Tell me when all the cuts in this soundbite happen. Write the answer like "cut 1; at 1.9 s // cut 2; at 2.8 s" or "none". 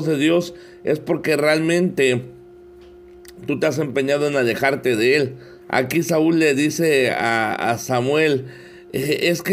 cut 1; at 5.6 s